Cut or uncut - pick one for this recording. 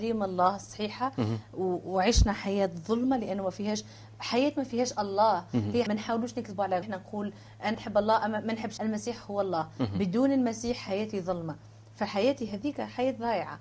cut